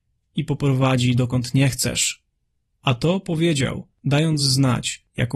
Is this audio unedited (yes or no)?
yes